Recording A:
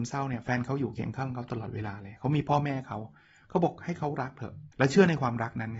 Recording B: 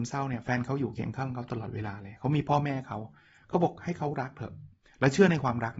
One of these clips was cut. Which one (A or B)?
A